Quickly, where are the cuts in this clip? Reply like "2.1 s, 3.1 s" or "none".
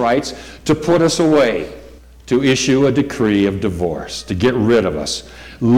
2.0 s

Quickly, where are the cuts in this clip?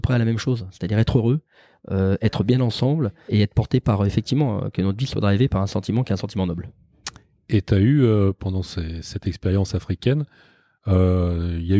3.3 s

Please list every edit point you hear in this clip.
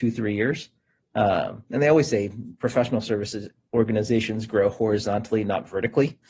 none

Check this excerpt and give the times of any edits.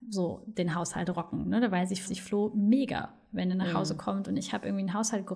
2.0 s

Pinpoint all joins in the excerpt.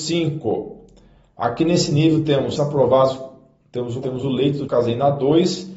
2.6 s, 4.0 s, 4.7 s

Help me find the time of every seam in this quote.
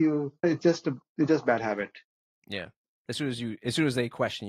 none

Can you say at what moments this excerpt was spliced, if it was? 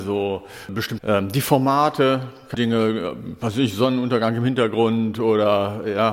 1.0 s, 2.5 s

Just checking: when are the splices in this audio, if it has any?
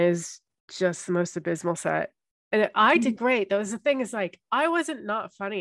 none

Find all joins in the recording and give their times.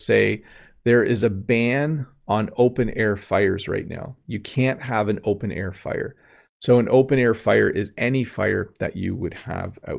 none

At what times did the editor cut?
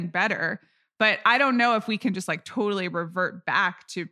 none

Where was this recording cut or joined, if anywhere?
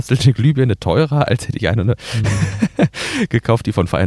none

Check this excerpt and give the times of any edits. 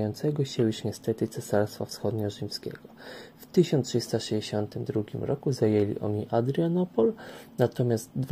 none

